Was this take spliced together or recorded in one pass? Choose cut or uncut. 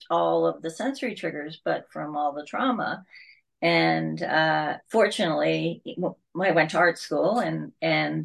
uncut